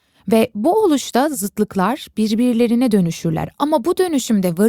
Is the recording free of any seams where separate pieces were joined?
yes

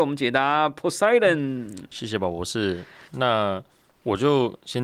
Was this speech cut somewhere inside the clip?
yes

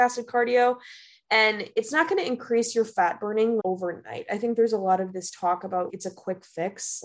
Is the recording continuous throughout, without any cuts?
no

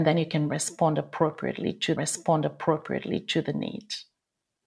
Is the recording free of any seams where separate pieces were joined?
no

